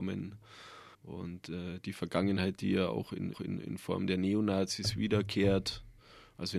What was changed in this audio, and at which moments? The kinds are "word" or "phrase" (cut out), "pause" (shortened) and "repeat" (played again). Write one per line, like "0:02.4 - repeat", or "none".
0:00.9 - pause
0:03.3 - repeat